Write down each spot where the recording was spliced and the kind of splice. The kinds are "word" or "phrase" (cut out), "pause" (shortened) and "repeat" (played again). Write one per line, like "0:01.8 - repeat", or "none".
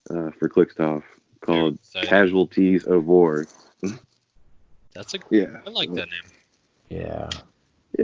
0:04.0 - pause